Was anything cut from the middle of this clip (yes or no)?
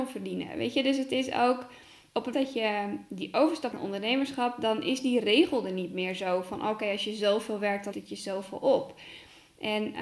yes